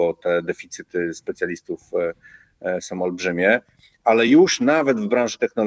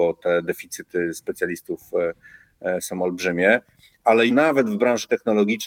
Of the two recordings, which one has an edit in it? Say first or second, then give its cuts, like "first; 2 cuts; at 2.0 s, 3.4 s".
second; 1 cut; at 4.3 s